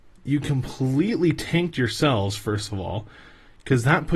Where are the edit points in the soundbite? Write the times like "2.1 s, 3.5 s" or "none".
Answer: none